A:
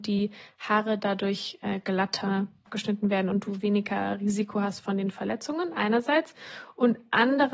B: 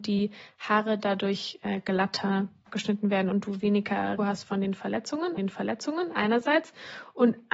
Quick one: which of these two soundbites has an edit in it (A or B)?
B